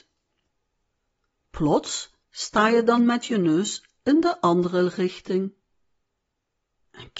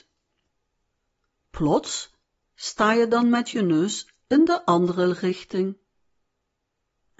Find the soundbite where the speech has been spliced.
first; 1 cut; at 2.2 s

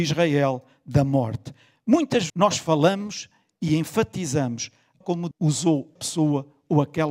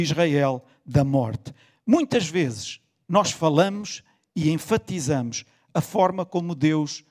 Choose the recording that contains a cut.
first; 4 cuts; at 2.3 s, 5.0 s, 5.3 s, 6.0 s

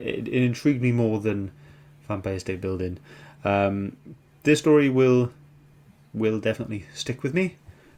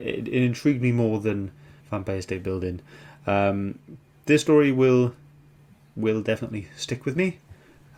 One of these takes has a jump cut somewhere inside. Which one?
second; 1 cut; at 1.8 s

